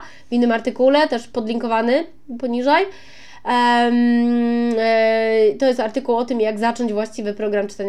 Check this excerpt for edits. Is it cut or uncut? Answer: uncut